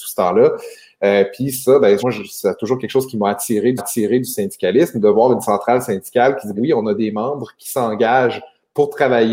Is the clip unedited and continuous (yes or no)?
no